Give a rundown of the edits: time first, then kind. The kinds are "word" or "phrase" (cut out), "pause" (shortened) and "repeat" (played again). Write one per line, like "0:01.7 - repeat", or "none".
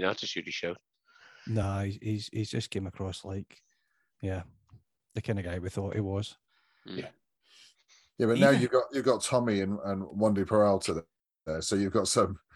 none